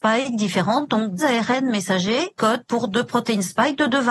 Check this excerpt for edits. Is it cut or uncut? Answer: cut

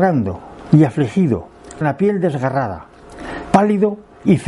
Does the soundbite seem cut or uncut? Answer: cut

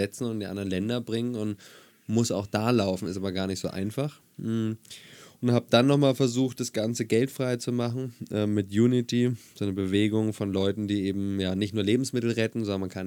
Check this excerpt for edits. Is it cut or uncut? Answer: uncut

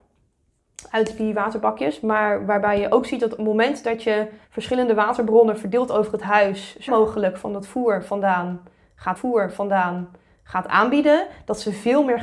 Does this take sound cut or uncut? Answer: cut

